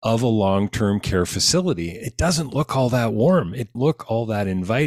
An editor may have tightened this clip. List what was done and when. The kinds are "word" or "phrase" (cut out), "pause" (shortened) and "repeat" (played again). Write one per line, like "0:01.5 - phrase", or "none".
0:03.7 - word